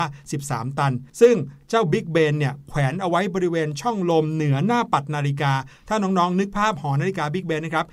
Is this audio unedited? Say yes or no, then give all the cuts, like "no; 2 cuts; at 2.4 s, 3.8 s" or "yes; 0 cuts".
no; 1 cut; at 1.1 s